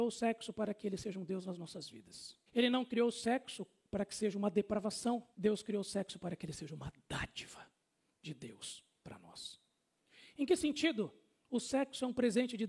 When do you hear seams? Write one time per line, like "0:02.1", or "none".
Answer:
0:02.5
0:05.3